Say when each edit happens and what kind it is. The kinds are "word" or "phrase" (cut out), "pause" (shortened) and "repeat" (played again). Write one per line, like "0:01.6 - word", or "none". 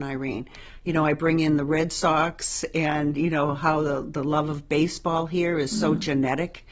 none

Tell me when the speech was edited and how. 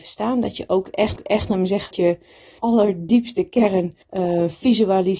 0:01.2 - repeat
0:01.9 - word
0:02.6 - word
0:04.0 - pause

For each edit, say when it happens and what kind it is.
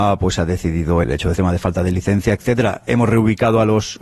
0:01.0 - word
0:01.4 - phrase

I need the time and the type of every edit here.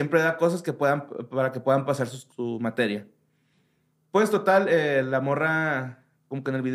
0:02.3 - word

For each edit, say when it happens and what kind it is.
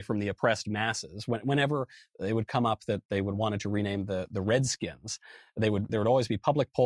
0:05.9 - word

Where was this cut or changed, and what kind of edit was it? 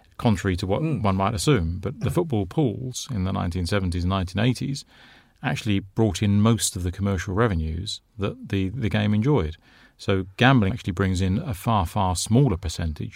0:10.7 - word

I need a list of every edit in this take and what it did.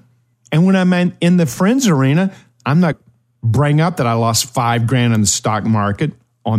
0:02.9 - word

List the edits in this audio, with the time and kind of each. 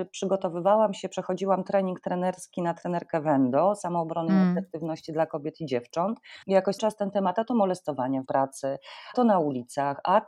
0:06.4 - pause
0:06.8 - word
0:08.3 - word
0:09.1 - word

